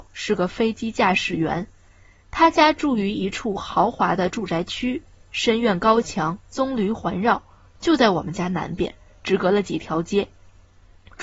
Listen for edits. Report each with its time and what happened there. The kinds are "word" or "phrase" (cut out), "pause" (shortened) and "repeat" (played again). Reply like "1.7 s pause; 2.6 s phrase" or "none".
6.4 s pause